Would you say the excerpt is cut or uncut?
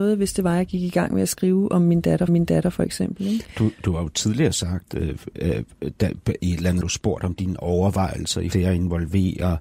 cut